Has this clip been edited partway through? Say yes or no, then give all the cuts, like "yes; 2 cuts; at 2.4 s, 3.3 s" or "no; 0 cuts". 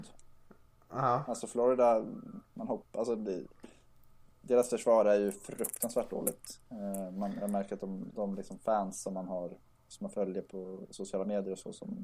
no; 0 cuts